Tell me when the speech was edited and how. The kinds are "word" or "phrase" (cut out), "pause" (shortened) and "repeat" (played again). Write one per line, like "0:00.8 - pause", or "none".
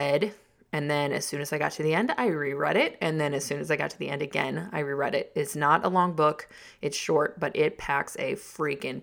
none